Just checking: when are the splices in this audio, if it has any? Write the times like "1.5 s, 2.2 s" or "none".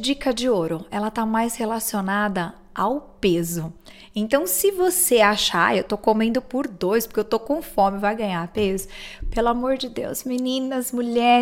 none